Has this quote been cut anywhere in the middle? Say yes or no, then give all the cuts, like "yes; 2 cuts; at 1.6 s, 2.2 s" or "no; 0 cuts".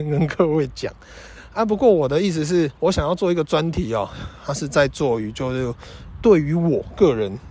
yes; 1 cut; at 2.8 s